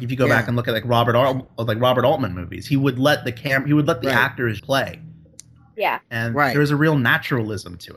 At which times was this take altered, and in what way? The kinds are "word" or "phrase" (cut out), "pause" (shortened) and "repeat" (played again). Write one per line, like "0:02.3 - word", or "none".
0:04.6 - word